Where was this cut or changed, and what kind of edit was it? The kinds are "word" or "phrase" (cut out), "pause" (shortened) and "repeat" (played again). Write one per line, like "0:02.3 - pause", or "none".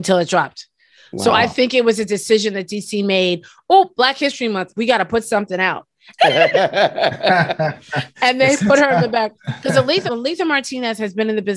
0:06.2 - word
0:09.4 - pause
0:10.1 - word